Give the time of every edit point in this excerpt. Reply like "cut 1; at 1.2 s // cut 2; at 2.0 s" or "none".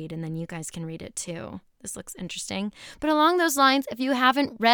none